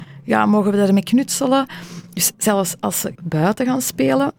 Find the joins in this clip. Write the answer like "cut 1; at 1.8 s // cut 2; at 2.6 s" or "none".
cut 1; at 2.3 s // cut 2; at 3.2 s